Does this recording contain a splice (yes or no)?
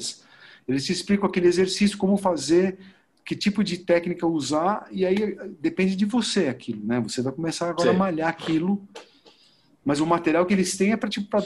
no